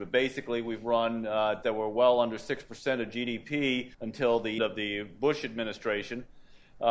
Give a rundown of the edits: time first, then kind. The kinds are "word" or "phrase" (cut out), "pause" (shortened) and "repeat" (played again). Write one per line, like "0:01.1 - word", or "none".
0:01.6 - word
0:03.9 - pause
0:04.6 - word